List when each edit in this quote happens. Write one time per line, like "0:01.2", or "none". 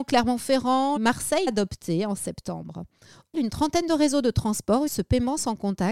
0:01.0
0:01.5
0:03.3
0:04.9